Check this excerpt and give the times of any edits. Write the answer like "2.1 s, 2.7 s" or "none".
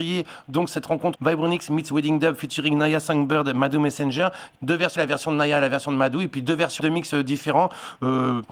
1.2 s, 4.5 s, 5.0 s, 6.8 s